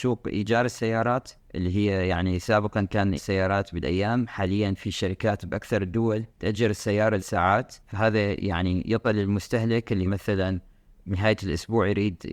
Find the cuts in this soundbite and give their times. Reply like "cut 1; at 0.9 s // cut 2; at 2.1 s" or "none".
cut 1; at 1.4 s // cut 2; at 3.2 s // cut 3; at 6.3 s // cut 4; at 7.2 s // cut 5; at 7.8 s // cut 6; at 9.0 s // cut 7; at 10.1 s

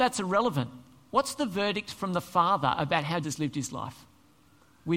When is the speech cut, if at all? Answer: cut 1; at 3.2 s

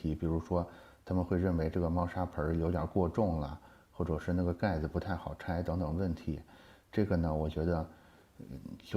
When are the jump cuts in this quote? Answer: none

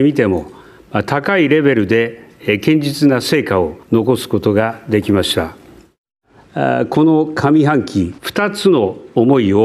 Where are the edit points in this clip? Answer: cut 1; at 3.8 s // cut 2; at 8.2 s

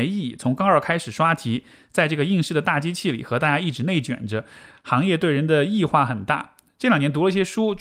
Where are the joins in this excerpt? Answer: none

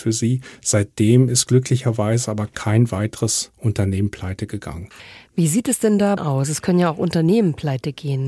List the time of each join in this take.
cut 1; at 6.2 s

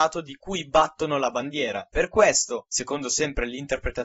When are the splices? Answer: none

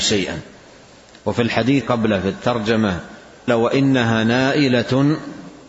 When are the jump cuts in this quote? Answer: cut 1; at 1.8 s // cut 2; at 3.5 s

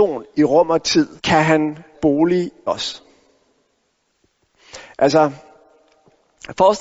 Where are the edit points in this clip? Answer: cut 1; at 1.2 s // cut 2; at 1.9 s // cut 3; at 2.7 s

